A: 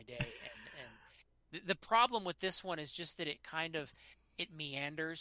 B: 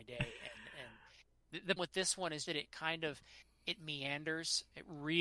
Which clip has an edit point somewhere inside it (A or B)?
B